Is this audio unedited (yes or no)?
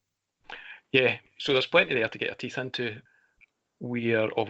yes